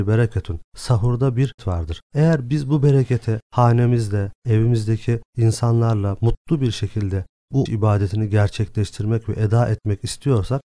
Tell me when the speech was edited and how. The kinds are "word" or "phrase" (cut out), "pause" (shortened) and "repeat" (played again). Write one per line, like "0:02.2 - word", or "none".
0:01.6 - word
0:07.7 - word